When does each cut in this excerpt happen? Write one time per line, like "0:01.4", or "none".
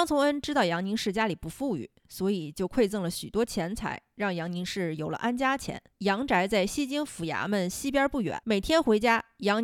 0:05.9
0:08.4